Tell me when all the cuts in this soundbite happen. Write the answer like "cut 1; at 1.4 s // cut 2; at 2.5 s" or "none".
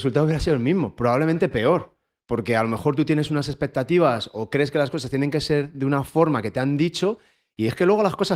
none